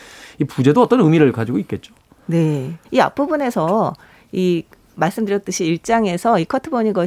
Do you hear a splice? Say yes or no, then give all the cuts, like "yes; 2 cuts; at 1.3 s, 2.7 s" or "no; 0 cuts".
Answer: yes; 1 cut; at 2.8 s